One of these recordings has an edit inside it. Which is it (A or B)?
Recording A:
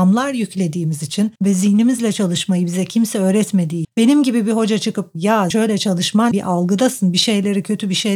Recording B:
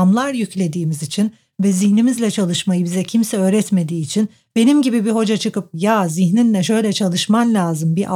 A